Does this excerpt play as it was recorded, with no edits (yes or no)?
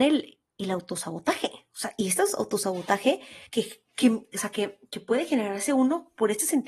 no